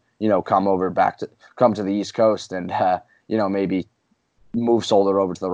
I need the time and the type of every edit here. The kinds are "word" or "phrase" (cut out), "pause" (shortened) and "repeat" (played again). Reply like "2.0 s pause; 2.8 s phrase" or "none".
none